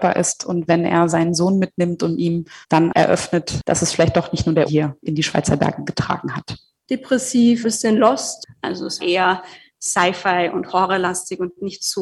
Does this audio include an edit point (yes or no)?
yes